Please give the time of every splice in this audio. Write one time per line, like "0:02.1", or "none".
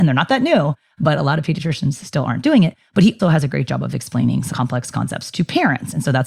0:03.2
0:04.5